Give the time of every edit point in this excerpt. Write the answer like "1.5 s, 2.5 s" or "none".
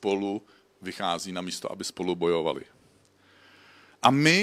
none